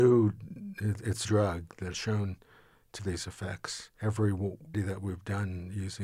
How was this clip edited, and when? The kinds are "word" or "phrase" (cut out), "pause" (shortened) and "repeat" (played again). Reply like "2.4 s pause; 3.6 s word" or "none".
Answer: 1.2 s phrase; 1.9 s phrase; 3.0 s word; 4.7 s word

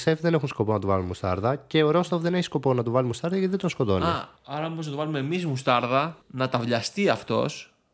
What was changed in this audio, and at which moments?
4.4 s pause; 6.2 s pause

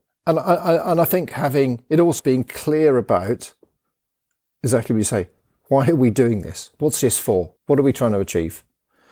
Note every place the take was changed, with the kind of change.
2.2 s word; 7.6 s pause

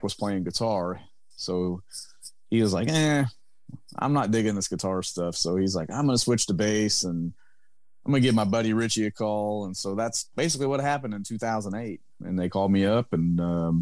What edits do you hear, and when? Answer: none

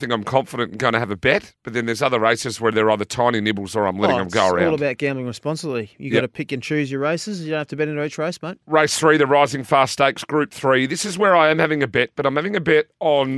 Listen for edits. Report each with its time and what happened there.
none

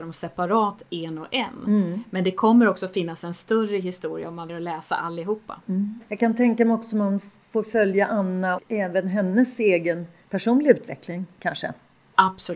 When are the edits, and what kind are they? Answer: 4.5 s word; 8.6 s word

